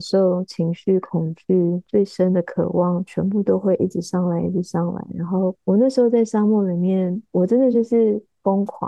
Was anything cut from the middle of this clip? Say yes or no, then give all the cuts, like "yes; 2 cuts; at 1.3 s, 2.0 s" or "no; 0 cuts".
yes; 1 cut; at 7.3 s